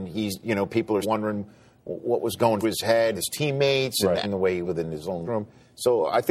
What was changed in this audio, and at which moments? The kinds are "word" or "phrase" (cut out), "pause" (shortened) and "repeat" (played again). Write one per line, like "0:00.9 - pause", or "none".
0:01.0 - word
0:02.6 - word
0:03.1 - word
0:04.2 - word
0:04.6 - word
0:05.2 - word